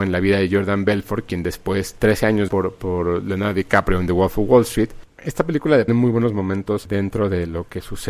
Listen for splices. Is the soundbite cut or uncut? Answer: cut